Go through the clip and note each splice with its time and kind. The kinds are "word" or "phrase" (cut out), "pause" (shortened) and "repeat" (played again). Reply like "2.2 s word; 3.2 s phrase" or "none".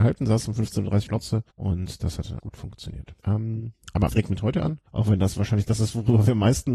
1.1 s word; 1.5 s pause; 2.4 s word; 3.2 s pause; 4.1 s phrase; 4.9 s pause

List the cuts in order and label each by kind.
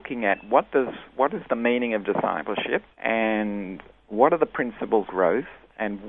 2.9 s pause; 5.1 s word

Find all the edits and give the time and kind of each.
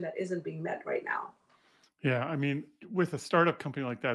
none

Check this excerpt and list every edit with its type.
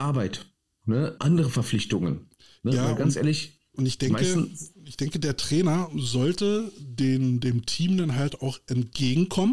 1.2 s word

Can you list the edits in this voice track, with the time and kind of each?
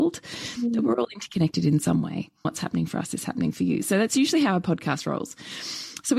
2.4 s word

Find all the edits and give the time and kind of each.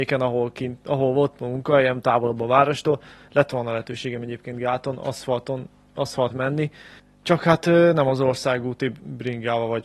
6.3 s word; 7.0 s pause

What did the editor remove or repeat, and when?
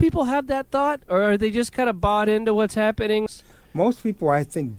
none

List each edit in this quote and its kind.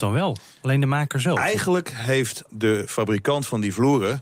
2.5 s word

